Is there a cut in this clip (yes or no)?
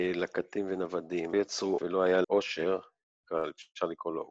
yes